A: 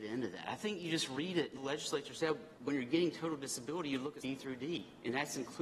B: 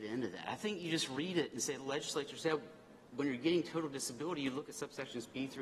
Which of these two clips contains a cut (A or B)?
A